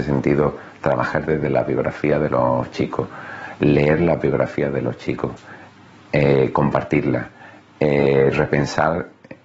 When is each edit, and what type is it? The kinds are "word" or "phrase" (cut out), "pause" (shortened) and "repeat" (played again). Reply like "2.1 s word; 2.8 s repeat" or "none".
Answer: none